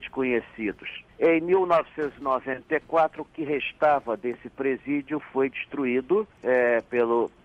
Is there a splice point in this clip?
yes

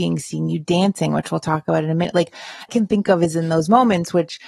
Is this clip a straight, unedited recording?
no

